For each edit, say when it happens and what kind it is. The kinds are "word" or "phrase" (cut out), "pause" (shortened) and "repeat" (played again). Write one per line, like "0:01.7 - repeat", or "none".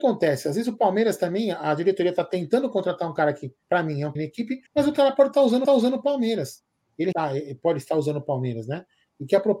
0:03.6 - pause
0:04.1 - phrase
0:04.7 - pause
0:05.6 - repeat
0:07.1 - word